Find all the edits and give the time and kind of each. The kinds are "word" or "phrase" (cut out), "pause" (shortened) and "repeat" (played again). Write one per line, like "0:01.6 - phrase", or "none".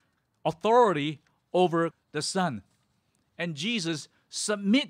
0:01.9 - word